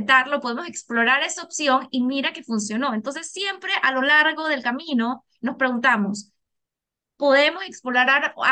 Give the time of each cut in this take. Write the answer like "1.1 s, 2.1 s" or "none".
none